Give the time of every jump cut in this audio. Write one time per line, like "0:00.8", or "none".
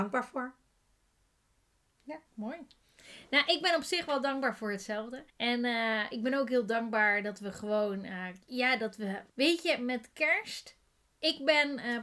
0:02.3
0:05.3
0:08.4
0:09.3